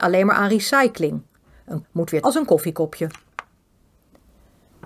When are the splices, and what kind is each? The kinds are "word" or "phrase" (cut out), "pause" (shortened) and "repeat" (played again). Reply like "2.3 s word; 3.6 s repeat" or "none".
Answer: 1.8 s word; 2.2 s word